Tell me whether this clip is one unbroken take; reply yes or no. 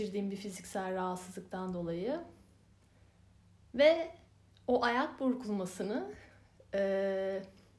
yes